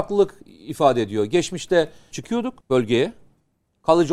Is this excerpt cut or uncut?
cut